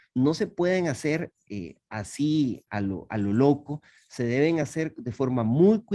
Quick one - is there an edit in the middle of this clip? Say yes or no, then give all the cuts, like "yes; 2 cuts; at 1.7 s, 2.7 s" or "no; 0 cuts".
no; 0 cuts